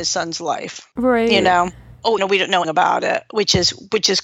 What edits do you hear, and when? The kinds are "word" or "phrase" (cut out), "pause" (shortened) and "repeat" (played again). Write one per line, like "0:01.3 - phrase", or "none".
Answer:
0:02.2 - word
0:02.6 - word